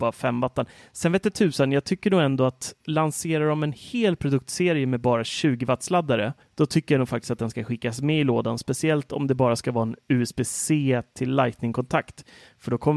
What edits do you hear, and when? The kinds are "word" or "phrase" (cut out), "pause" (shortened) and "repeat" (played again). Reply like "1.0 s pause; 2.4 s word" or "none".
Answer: 2.8 s pause; 6.4 s pause